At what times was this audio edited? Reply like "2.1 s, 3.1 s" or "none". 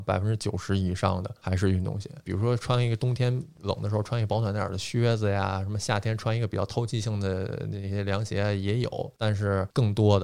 none